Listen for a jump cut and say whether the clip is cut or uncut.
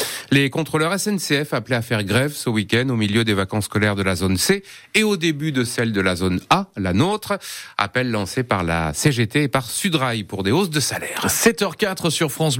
uncut